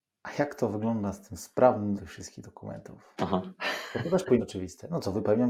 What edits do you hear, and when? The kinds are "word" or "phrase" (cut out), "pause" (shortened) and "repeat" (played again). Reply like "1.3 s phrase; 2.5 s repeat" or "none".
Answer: 2.0 s word; 4.4 s word